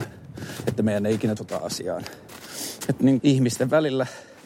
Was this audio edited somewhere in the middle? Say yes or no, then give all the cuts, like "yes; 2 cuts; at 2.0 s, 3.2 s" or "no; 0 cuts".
yes; 2 cuts; at 1.4 s, 3.2 s